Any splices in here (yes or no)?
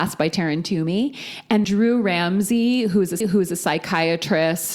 yes